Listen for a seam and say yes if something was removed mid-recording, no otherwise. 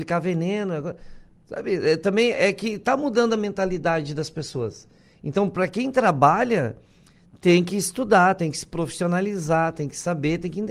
no